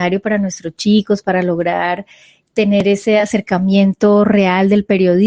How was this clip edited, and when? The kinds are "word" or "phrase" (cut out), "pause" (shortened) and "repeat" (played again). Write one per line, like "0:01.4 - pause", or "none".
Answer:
none